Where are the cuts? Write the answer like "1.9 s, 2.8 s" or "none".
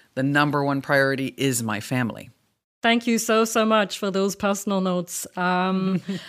none